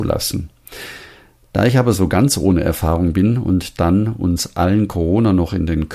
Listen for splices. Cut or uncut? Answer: uncut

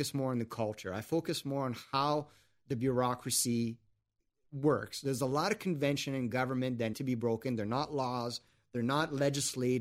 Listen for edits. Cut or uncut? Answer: cut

